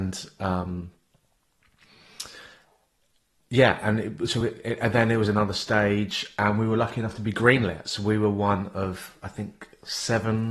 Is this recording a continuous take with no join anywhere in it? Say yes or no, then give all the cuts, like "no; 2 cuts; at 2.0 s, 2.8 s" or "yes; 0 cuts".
yes; 0 cuts